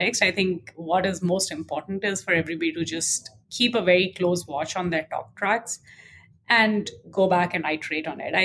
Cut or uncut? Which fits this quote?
uncut